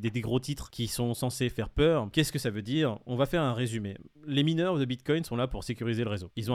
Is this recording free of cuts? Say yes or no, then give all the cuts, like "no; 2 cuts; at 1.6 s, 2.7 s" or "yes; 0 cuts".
no; 1 cut; at 4.1 s